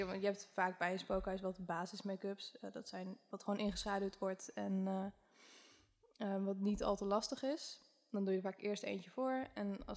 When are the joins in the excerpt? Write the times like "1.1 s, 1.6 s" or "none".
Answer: 3.3 s